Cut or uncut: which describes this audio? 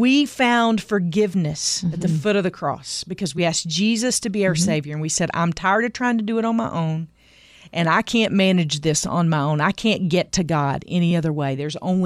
uncut